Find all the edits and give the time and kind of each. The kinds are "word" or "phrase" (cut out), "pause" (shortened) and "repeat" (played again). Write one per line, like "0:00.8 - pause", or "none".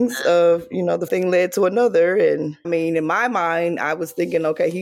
0:01.1 - phrase
0:02.6 - word